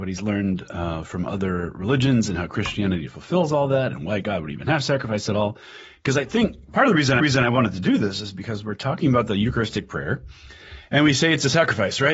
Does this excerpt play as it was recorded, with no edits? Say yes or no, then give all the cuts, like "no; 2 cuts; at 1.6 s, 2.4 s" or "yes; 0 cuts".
no; 1 cut; at 7.2 s